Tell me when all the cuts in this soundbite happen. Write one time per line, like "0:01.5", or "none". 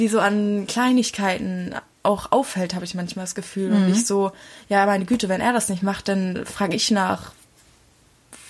none